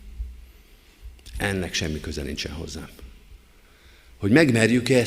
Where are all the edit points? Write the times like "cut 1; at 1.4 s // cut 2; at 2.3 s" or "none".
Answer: none